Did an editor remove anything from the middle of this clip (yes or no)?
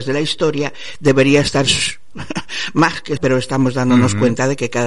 yes